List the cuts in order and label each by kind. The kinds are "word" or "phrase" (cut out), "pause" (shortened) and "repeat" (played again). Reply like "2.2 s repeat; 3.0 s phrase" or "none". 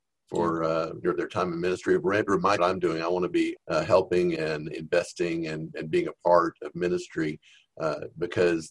1.0 s phrase; 2.3 s word; 2.6 s phrase; 3.5 s phrase; 4.3 s word